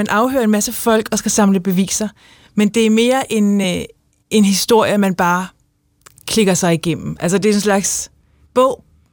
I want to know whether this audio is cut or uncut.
uncut